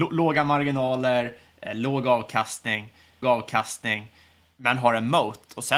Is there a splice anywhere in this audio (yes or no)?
yes